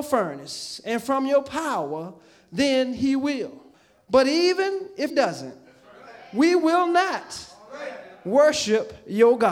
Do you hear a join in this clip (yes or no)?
yes